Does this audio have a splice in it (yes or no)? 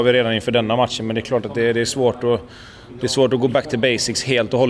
no